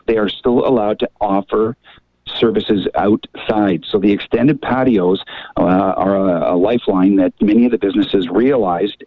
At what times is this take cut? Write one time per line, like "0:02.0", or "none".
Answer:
none